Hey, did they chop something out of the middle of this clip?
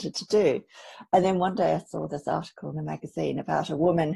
no; 0 cuts

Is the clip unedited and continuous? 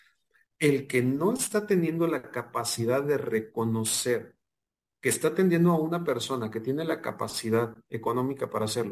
yes; 0 cuts

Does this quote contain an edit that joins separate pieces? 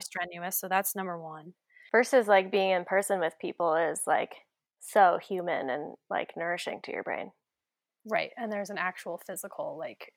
no; 0 cuts

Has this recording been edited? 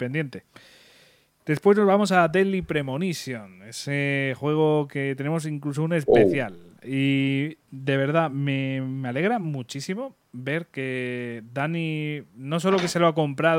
no; 0 cuts

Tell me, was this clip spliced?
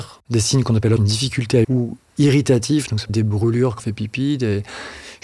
yes; 4 cuts; at 1.0 s, 1.6 s, 3.1 s, 3.8 s

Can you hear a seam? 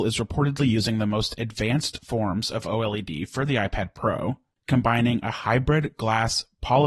no; 0 cuts

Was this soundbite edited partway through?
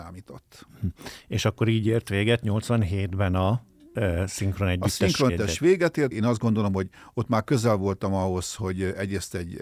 yes; 2 cuts; at 5.3 s, 6.1 s

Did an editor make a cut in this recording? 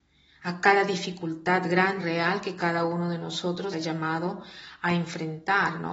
yes; 2 cuts; at 2.0 s, 3.7 s

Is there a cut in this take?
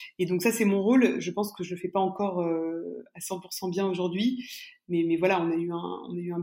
no; 0 cuts

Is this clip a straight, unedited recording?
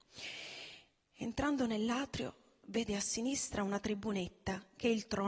yes; 0 cuts

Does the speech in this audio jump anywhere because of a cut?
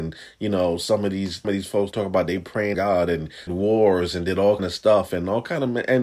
yes; 5 cuts; at 1.4 s, 1.9 s, 2.7 s, 3.5 s, 4.6 s

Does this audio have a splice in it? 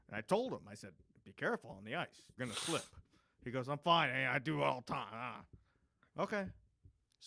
yes; 1 cut; at 2.4 s

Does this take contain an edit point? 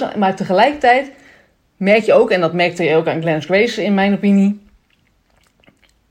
no; 0 cuts

